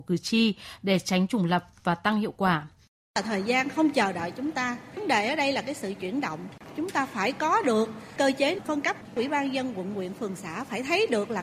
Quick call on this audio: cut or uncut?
uncut